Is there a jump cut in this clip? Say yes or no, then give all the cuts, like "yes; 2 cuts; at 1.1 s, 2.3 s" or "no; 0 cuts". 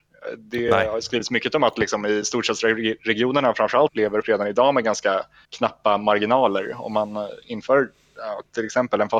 yes; 3 cuts; at 3.9 s, 4.2 s, 5.4 s